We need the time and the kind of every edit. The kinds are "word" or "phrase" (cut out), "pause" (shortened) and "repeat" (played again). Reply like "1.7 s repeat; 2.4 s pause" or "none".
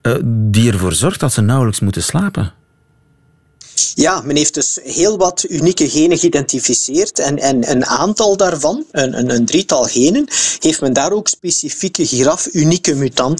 none